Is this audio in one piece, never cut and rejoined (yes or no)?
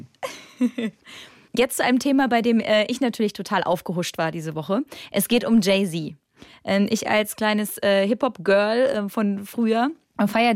yes